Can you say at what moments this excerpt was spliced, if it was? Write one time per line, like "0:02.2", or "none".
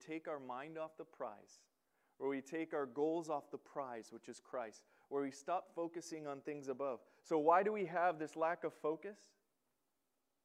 none